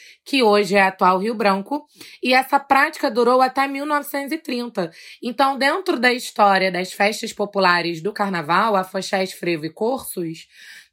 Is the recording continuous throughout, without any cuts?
yes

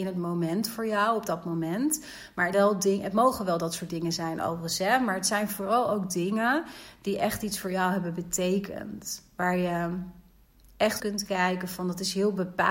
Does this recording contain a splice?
yes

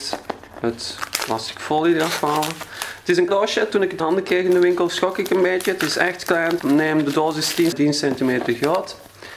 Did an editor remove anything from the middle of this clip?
yes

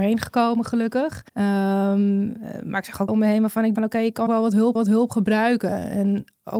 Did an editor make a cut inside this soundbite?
yes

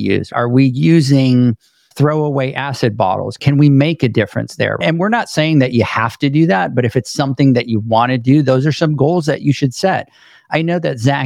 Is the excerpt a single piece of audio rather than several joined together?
yes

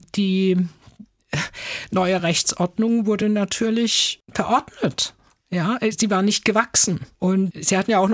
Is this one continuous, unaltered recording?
yes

